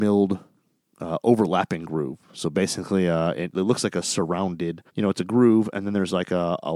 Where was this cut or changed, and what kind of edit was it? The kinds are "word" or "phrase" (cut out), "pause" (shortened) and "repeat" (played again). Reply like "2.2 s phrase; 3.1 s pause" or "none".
4.9 s pause